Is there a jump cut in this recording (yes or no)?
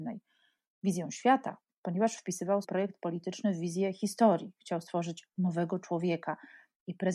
yes